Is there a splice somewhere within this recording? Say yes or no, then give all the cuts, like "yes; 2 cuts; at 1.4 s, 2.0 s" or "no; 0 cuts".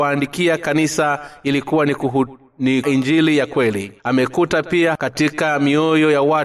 yes; 3 cuts; at 2.8 s, 4.0 s, 5.0 s